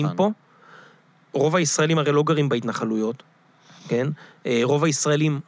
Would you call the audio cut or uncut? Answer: uncut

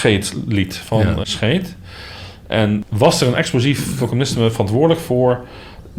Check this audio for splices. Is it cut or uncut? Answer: cut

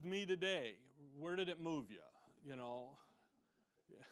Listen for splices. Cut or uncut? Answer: uncut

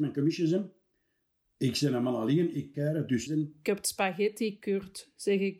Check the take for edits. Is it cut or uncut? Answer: cut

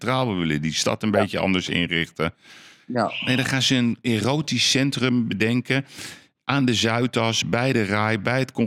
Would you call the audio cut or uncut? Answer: uncut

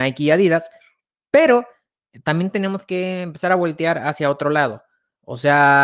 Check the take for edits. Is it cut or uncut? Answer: uncut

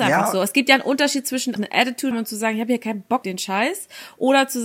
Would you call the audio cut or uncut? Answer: cut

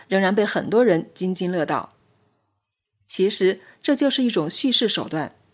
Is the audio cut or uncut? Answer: uncut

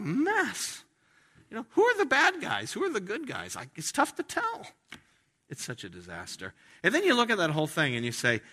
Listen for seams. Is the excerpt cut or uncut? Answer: uncut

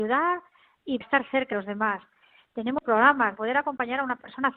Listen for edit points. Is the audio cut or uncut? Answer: cut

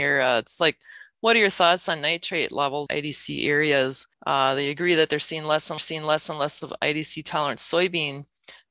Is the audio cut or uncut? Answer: cut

